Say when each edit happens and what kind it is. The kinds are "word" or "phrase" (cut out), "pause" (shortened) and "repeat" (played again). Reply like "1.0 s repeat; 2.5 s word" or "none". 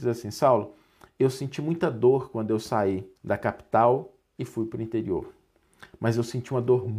3.2 s pause